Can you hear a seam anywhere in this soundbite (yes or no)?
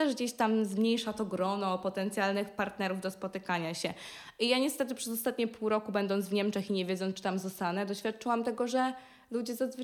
no